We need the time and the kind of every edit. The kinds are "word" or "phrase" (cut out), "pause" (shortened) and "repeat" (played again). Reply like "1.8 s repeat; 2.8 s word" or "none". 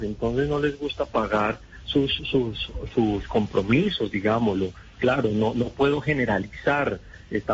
none